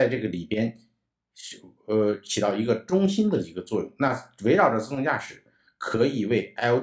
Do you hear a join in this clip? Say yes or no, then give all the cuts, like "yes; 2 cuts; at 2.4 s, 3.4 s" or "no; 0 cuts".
no; 0 cuts